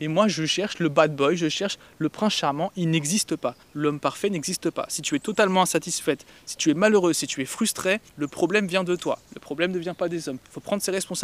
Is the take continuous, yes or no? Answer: no